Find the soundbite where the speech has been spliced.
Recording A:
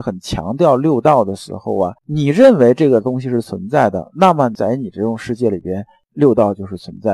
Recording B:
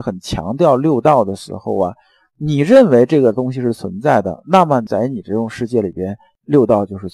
A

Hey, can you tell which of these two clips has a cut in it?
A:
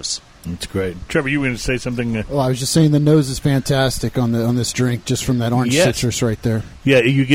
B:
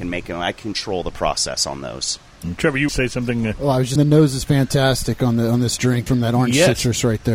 B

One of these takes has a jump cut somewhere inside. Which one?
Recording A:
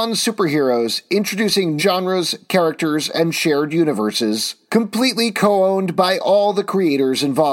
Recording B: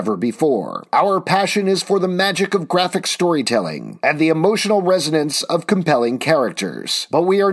A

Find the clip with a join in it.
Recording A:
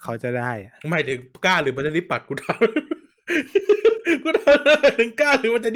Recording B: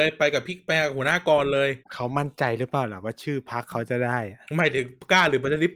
B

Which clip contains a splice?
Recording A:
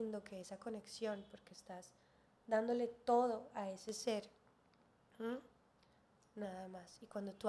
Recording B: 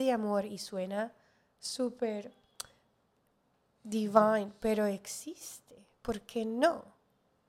A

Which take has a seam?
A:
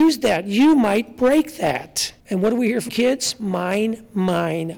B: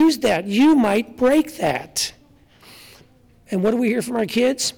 A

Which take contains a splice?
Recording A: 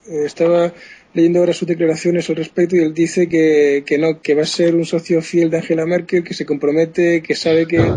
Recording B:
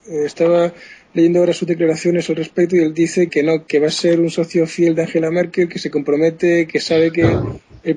B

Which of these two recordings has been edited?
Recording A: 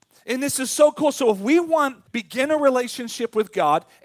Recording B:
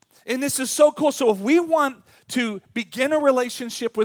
A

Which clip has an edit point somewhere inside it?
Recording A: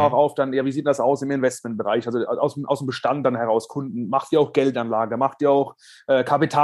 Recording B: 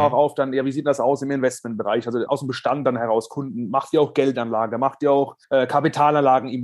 B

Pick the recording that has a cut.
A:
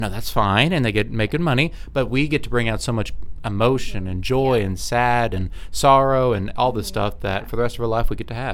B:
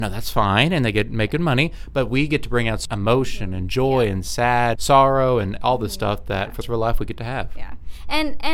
B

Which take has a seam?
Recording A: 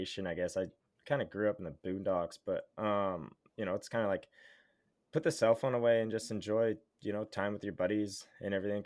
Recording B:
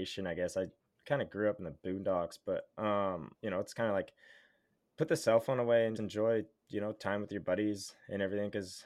B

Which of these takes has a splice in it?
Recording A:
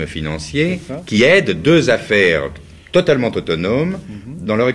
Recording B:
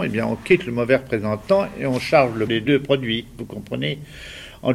B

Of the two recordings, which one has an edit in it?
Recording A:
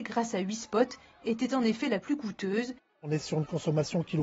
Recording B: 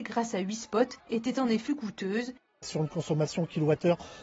B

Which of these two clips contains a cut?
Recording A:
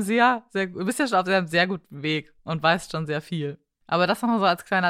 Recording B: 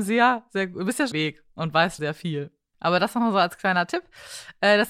B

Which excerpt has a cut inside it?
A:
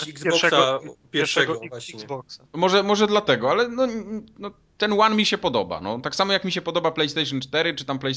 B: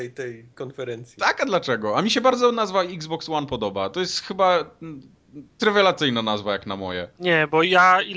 B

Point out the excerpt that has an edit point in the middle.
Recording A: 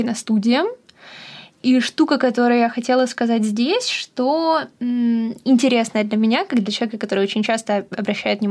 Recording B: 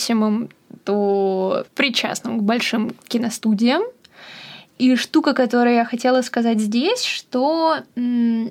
B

